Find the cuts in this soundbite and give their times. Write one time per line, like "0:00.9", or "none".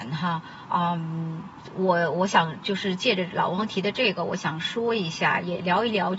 none